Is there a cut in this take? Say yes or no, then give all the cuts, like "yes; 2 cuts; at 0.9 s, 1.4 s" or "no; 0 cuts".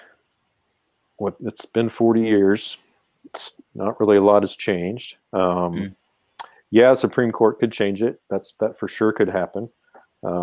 no; 0 cuts